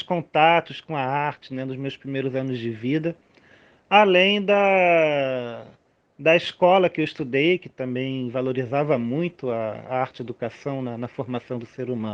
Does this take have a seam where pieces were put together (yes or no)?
no